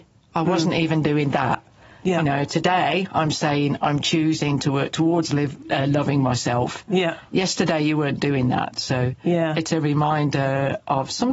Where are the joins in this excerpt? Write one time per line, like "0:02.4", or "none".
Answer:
none